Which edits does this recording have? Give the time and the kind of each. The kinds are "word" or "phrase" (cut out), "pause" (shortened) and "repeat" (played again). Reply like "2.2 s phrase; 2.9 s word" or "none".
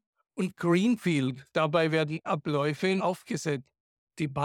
2.2 s word; 3.0 s word